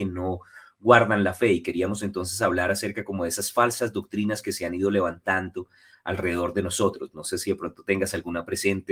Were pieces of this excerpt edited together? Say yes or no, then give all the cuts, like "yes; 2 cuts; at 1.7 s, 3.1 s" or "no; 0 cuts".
no; 0 cuts